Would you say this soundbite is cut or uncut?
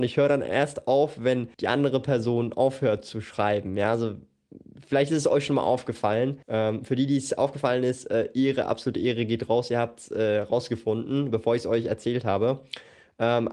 cut